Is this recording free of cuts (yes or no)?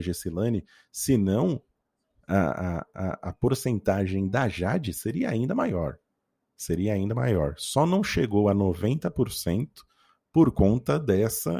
yes